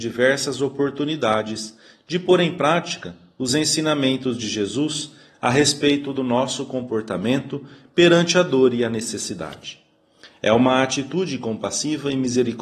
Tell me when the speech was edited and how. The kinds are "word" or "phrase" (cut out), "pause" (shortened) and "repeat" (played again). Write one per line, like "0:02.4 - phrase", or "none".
none

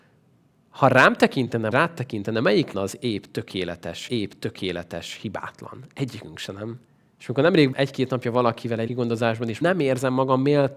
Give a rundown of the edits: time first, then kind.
0:01.7 - word
0:02.7 - phrase
0:04.1 - repeat
0:06.9 - pause
0:07.7 - word
0:08.9 - word
0:09.6 - phrase

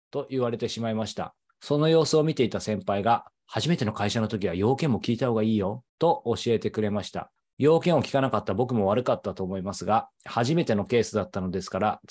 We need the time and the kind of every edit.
0:01.5 - pause
0:05.9 - pause
0:07.4 - pause

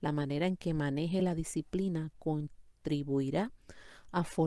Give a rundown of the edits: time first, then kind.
none

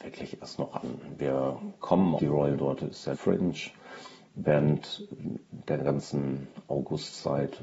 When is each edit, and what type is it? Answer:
0:02.2 - word
0:02.5 - word
0:03.1 - word

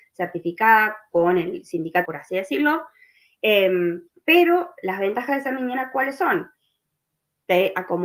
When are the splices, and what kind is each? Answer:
0:02.0 - phrase
0:04.1 - pause

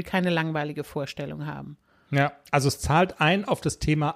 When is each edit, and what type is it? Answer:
none

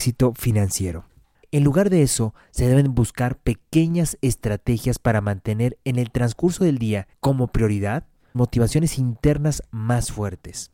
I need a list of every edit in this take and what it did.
0:07.1 - pause
0:08.3 - word

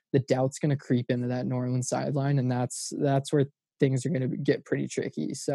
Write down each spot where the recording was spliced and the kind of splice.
none

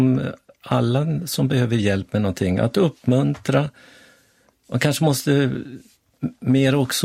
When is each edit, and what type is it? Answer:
none

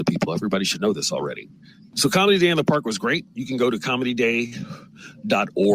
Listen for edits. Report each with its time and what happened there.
none

